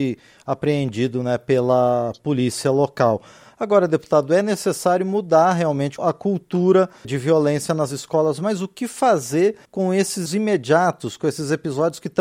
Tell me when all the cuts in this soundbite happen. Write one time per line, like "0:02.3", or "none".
0:06.0
0:07.0
0:09.6
0:10.3

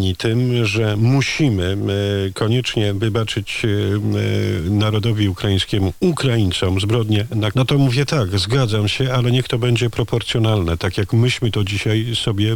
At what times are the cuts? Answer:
0:07.5

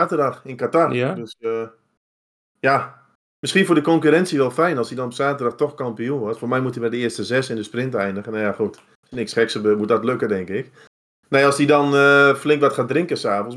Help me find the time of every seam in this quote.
none

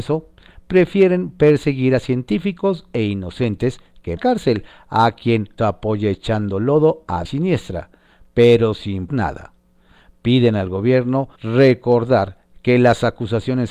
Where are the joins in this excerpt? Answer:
0:04.2
0:05.6
0:07.2
0:09.1
0:11.4

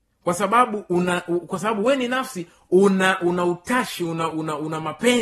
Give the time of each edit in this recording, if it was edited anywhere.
none

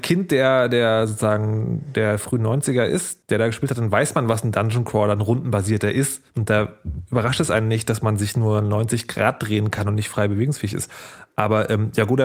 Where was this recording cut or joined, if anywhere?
0:03.2
0:06.3

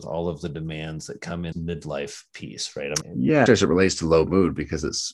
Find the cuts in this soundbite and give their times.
0:01.5
0:03.0
0:03.5

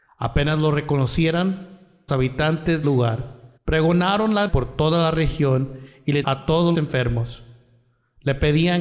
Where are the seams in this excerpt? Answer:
0:02.1
0:02.8
0:03.6
0:04.5
0:06.2
0:06.7

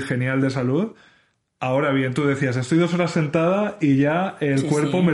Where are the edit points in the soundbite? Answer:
none

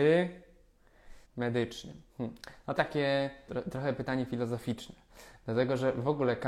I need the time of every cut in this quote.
0:01.2
0:02.1
0:02.8
0:03.5

